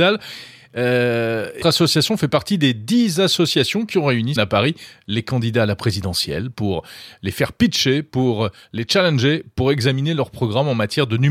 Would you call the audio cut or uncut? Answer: cut